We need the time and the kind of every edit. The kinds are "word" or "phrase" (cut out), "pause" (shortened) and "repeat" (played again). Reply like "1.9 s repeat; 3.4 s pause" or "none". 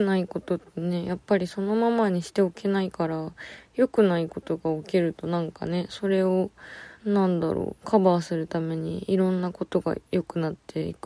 7.0 s pause